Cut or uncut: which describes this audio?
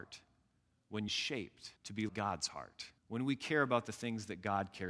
cut